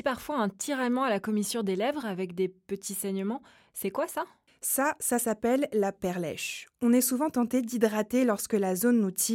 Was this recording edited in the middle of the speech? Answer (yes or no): no